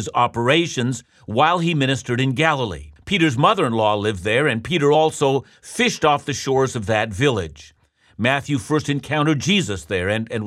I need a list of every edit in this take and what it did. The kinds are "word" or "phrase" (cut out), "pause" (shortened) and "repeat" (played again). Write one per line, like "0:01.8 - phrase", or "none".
none